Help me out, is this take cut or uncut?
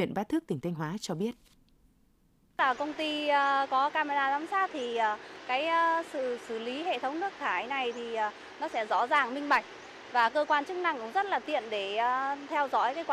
uncut